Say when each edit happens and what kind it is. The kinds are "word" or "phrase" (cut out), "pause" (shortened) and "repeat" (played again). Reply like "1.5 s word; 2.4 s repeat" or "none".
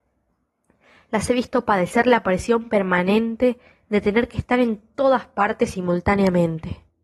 none